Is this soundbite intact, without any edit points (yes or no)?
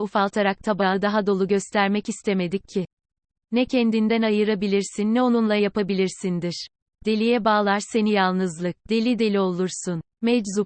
no